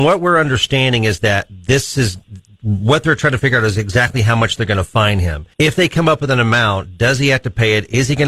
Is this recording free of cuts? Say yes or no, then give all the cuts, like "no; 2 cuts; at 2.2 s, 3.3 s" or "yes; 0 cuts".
no; 1 cut; at 5.5 s